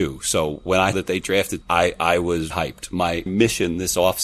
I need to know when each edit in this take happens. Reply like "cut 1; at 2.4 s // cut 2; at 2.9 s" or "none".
cut 1; at 0.9 s // cut 2; at 1.6 s // cut 3; at 2.5 s // cut 4; at 3.3 s